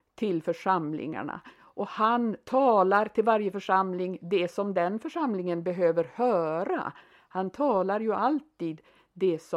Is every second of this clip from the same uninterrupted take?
yes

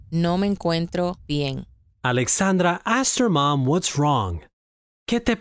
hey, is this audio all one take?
yes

